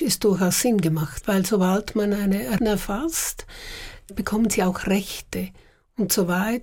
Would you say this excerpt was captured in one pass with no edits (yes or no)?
no